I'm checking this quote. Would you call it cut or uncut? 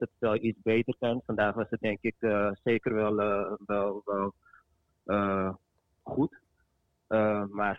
uncut